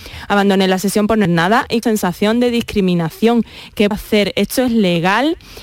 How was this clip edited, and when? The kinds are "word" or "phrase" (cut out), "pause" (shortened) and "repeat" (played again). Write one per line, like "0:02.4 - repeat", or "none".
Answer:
0:01.2 - word
0:01.8 - word
0:03.9 - word